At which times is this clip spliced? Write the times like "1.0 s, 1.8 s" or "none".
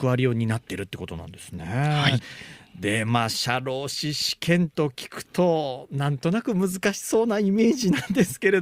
none